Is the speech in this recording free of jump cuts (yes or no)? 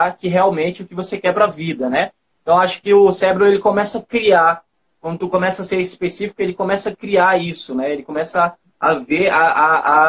yes